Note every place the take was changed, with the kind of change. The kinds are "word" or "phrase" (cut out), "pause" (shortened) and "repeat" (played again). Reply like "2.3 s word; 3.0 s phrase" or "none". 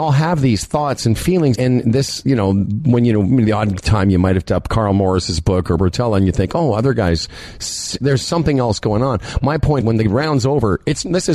1.5 s word; 4.5 s word; 5.8 s word; 8.0 s word; 9.8 s word